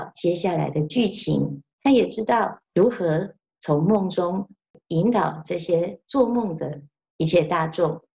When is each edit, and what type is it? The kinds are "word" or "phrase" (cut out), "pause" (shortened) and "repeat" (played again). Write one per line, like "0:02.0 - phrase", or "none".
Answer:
0:01.7 - pause
0:02.6 - pause